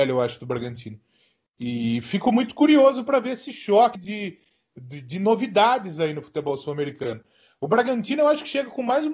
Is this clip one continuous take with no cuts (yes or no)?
no